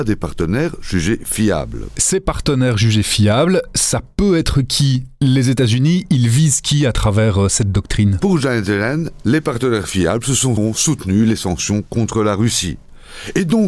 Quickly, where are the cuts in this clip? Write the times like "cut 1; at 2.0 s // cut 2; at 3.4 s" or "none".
cut 1; at 10.6 s